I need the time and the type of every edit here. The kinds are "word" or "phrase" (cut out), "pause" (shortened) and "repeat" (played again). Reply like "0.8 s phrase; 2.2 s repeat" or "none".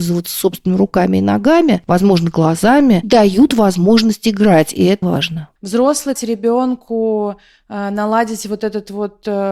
3.0 s word; 5.0 s word; 6.2 s phrase